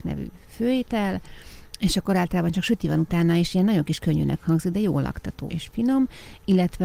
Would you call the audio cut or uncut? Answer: cut